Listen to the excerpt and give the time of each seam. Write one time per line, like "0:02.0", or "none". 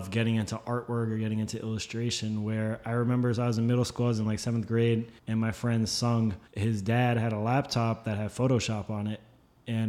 0:05.2
0:06.5